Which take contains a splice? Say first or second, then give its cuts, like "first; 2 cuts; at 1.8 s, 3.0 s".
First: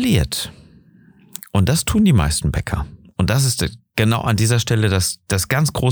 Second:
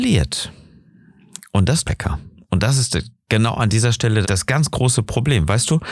second; 2 cuts; at 1.8 s, 4.2 s